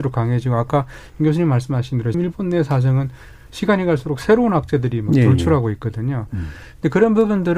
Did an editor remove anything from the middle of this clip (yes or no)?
yes